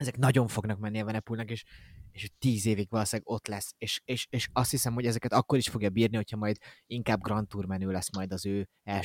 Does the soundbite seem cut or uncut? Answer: uncut